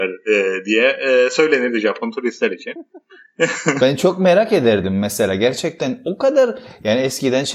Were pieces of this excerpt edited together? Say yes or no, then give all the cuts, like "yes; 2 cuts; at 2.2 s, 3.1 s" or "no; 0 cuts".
no; 0 cuts